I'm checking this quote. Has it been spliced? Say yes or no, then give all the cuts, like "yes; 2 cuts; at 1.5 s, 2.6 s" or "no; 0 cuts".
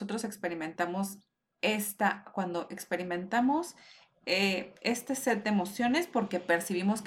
no; 0 cuts